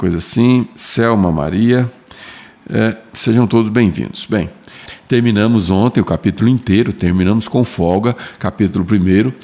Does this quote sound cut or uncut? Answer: uncut